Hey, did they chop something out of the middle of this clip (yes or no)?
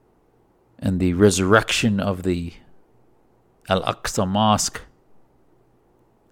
no